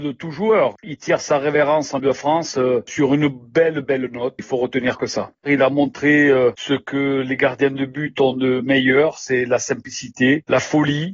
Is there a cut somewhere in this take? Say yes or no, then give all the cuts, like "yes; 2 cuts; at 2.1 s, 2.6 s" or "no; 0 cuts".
yes; 3 cuts; at 2.0 s, 3.8 s, 4.4 s